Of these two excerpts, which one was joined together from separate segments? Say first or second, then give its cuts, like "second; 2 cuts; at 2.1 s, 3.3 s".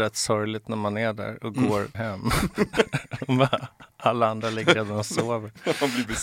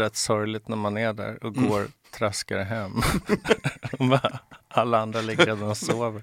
first; 1 cut; at 1.9 s